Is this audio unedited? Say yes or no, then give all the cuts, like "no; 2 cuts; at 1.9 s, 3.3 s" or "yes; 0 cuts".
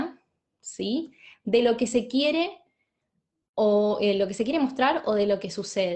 yes; 0 cuts